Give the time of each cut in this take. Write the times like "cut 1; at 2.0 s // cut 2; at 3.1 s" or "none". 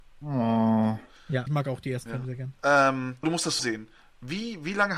cut 1; at 1.5 s // cut 2; at 2.1 s // cut 3; at 3.2 s // cut 4; at 3.6 s